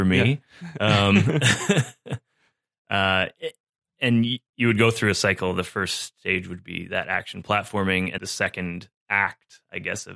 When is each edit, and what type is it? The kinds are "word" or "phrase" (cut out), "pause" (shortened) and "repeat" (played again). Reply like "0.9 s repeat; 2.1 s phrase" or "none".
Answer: 8.2 s word